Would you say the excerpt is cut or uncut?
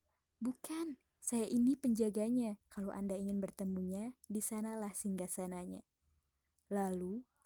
cut